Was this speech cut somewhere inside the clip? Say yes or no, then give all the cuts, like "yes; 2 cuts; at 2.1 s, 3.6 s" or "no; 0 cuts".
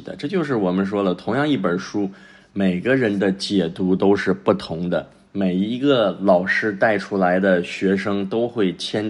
no; 0 cuts